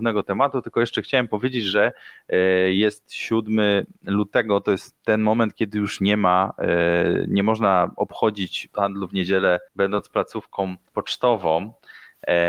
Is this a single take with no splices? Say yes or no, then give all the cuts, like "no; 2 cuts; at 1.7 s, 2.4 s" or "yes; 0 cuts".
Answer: no; 2 cuts; at 8.7 s, 10.9 s